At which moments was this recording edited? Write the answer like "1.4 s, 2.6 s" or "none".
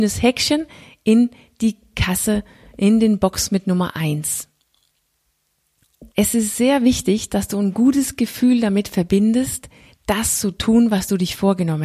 6.1 s